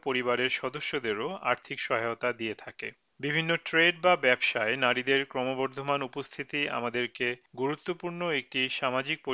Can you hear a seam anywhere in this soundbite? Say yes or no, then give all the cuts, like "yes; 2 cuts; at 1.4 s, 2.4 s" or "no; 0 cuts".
no; 0 cuts